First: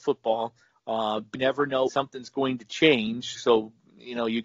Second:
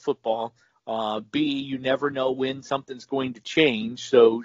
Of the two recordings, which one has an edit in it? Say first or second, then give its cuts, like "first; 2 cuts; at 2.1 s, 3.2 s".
first; 3 cuts; at 1.3 s, 1.9 s, 3.4 s